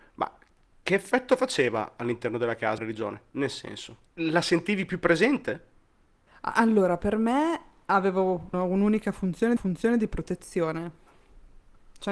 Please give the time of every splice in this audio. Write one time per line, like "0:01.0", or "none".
0:02.8
0:04.1
0:08.5
0:09.6